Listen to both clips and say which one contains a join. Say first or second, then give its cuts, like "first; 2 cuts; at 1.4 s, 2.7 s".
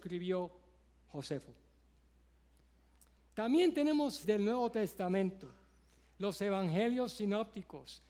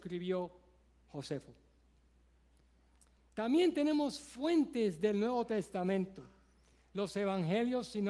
first; 1 cut; at 4.2 s